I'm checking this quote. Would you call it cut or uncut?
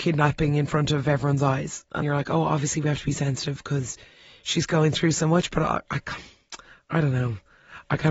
cut